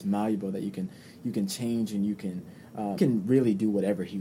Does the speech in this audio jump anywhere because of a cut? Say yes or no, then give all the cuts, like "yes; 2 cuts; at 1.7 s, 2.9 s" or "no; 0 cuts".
yes; 1 cut; at 3.0 s